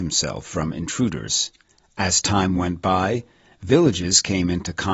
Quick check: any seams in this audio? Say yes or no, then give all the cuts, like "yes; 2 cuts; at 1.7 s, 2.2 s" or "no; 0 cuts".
no; 0 cuts